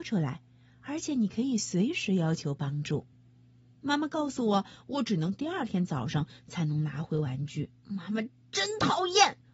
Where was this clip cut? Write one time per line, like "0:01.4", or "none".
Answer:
0:03.1
0:07.8